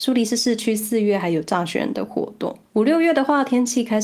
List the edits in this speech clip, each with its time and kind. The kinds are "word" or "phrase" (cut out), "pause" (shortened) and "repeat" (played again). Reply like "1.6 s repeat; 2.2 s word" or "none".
2.7 s pause